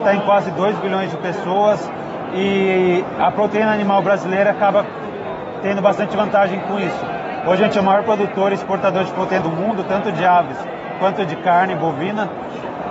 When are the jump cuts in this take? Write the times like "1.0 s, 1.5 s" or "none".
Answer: 9.4 s